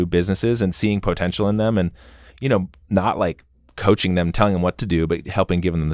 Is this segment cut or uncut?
uncut